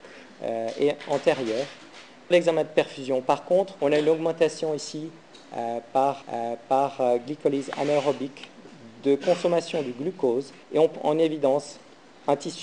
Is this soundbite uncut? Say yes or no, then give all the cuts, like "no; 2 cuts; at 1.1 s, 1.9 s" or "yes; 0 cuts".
no; 5 cuts; at 2.3 s, 3.8 s, 6.2 s, 10.6 s, 10.9 s